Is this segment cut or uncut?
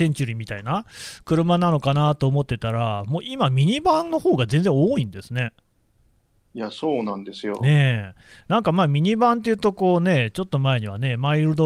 uncut